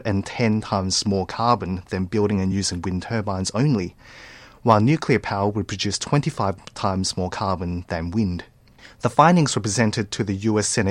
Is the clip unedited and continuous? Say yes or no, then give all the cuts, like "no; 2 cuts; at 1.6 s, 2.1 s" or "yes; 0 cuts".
yes; 0 cuts